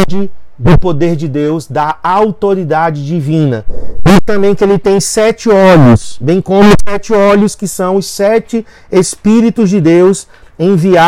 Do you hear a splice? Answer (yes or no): no